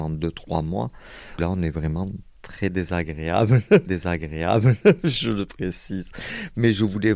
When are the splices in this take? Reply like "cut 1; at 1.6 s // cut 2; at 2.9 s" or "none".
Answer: cut 1; at 1.4 s // cut 2; at 3.9 s

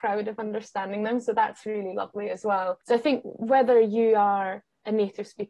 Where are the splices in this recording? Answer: none

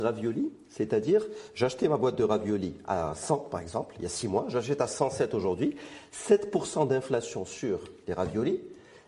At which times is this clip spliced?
none

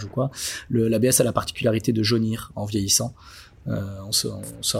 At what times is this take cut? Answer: none

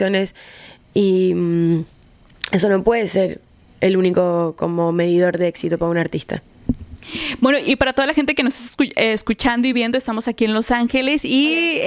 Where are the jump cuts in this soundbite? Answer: none

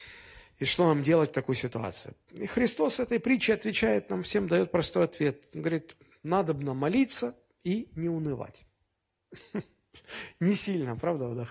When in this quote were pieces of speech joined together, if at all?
none

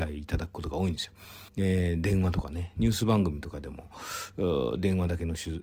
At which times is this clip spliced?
cut 1; at 1.5 s

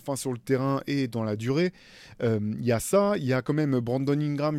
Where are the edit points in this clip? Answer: none

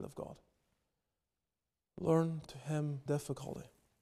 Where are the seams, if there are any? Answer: cut 1; at 2.4 s // cut 2; at 3.1 s

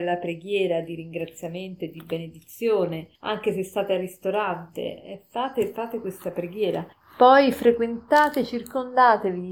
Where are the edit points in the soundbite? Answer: cut 1; at 3.1 s // cut 2; at 6.9 s

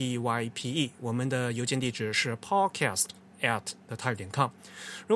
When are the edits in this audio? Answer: none

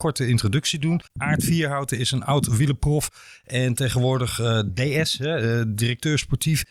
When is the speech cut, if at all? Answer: cut 1; at 1.1 s

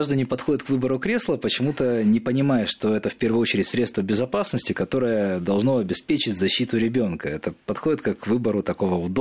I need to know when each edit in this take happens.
none

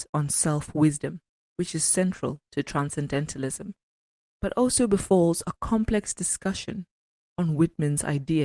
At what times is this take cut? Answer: none

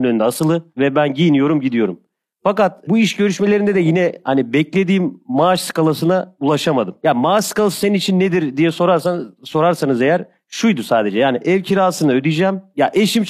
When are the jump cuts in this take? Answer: none

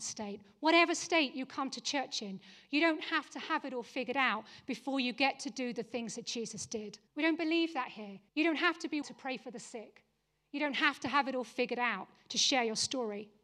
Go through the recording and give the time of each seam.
cut 1; at 7.1 s // cut 2; at 8.3 s // cut 3; at 9.0 s

